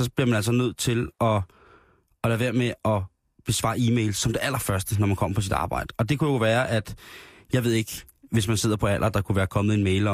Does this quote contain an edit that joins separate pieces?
no; 0 cuts

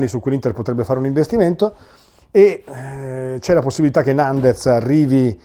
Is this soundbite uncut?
yes; 0 cuts

